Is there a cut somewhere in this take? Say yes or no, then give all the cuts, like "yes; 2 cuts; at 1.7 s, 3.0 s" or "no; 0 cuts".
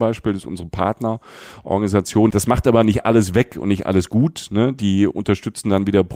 no; 0 cuts